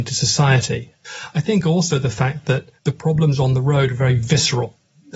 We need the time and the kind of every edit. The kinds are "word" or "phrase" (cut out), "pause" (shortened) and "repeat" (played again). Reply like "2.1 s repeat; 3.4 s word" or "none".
2.8 s pause